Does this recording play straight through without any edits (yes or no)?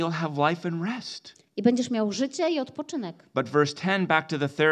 yes